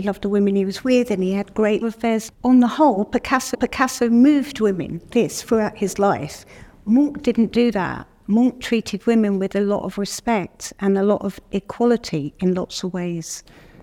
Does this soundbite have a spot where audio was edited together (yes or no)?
yes